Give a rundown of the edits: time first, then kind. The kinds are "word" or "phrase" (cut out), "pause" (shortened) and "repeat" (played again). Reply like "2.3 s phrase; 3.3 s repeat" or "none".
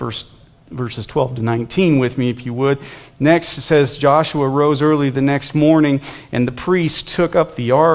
none